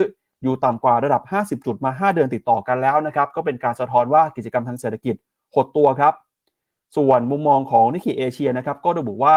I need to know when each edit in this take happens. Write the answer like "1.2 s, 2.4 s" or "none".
none